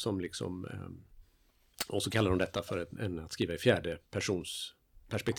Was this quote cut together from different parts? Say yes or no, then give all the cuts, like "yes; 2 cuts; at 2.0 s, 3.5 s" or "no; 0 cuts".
no; 0 cuts